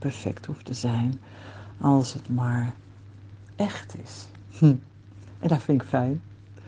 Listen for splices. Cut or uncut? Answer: uncut